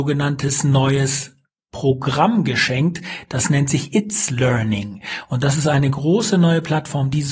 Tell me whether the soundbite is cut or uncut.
uncut